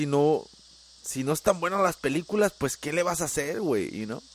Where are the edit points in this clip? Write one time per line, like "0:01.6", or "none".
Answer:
none